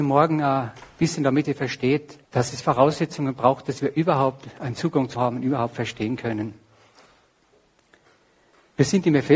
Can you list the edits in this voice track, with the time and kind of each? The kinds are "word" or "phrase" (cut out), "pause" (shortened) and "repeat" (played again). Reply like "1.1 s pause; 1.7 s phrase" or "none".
1.4 s phrase; 2.2 s pause; 5.1 s word